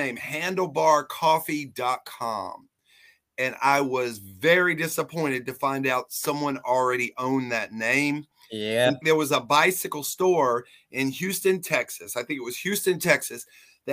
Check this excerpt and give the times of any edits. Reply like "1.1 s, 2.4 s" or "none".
9.0 s